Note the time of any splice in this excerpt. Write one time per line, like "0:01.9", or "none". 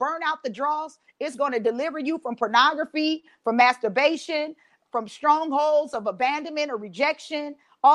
0:04.9